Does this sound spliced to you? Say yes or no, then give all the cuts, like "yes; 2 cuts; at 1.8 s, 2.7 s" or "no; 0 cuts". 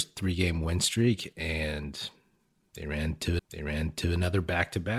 yes; 1 cut; at 3.4 s